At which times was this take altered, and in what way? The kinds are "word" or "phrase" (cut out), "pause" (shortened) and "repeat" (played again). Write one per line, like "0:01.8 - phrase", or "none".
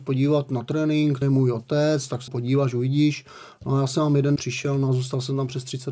0:01.2 - word
0:02.3 - word
0:04.4 - word